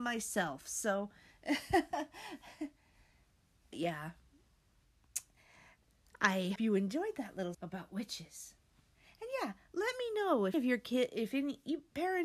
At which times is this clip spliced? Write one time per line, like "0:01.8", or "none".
0:03.7
0:06.6
0:07.5
0:10.5